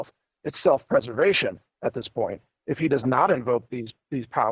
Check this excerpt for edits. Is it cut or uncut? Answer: uncut